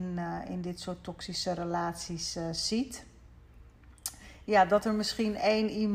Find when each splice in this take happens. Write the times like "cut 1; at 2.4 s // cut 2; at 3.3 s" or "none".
none